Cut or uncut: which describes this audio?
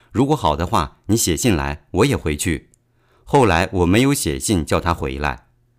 uncut